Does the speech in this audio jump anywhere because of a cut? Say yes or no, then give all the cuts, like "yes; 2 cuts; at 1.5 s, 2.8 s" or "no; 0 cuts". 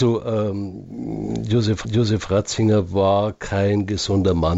yes; 1 cut; at 1.8 s